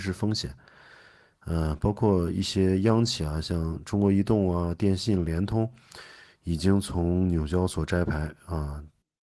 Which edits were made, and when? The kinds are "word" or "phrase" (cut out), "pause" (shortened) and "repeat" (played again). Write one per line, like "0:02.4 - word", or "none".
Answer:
none